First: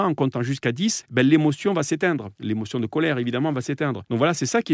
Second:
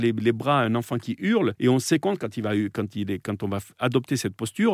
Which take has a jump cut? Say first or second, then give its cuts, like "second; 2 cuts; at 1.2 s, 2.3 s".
second; 1 cut; at 2.0 s